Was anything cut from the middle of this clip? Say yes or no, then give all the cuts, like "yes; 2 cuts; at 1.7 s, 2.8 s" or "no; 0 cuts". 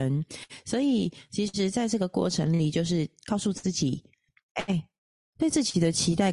no; 0 cuts